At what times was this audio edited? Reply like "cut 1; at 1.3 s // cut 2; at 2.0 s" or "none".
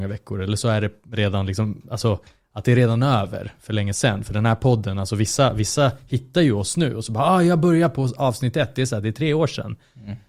none